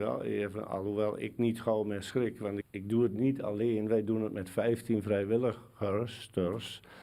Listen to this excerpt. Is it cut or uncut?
cut